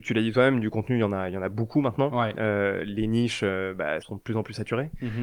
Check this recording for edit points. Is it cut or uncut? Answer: cut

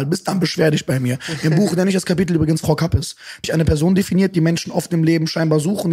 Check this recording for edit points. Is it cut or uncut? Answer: cut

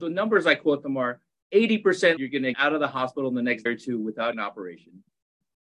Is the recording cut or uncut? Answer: cut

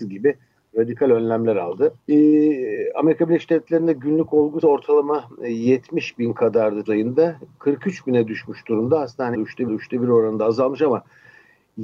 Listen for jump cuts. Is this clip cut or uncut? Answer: cut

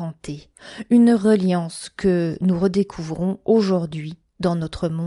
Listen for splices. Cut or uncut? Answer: uncut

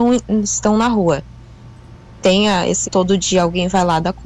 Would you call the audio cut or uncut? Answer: cut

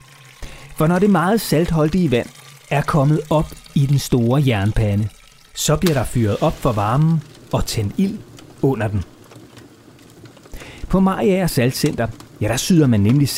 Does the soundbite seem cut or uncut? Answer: uncut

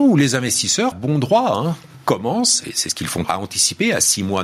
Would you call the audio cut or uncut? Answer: cut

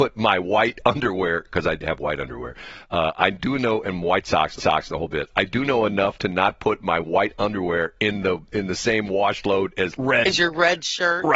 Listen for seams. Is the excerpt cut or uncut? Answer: cut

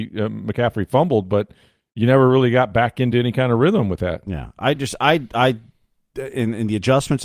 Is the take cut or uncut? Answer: uncut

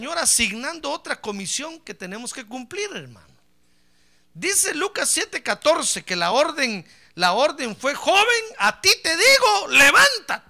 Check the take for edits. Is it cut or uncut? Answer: uncut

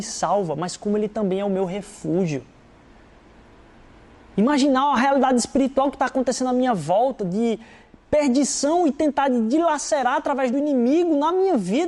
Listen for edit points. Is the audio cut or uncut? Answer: uncut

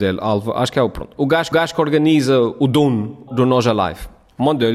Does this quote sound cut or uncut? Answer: cut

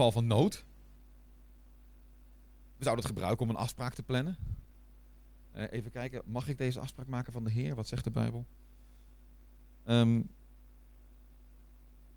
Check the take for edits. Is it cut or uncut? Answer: uncut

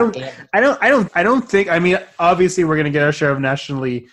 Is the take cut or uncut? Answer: cut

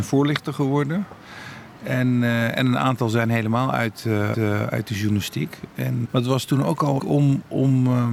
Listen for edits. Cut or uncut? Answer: cut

